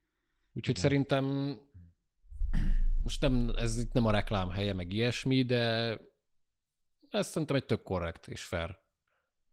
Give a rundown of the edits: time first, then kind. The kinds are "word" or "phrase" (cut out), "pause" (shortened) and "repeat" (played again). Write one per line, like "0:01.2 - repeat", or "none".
none